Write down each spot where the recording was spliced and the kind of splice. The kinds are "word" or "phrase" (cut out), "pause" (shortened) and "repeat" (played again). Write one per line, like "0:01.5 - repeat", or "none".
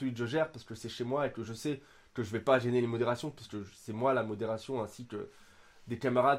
none

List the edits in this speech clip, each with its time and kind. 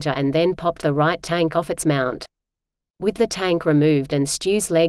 none

